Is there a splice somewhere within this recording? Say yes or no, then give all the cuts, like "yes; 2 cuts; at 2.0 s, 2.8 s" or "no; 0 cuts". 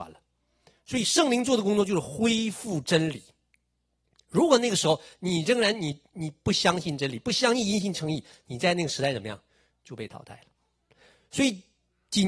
no; 0 cuts